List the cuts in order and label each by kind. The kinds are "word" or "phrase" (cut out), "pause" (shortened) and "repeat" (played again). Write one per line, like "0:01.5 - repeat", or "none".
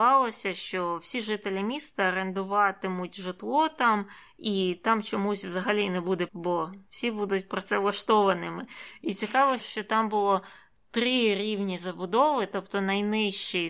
0:06.3 - word
0:09.6 - word